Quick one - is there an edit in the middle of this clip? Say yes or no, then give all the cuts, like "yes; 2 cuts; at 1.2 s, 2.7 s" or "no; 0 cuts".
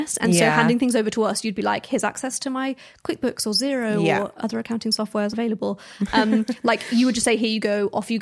yes; 1 cut; at 5.3 s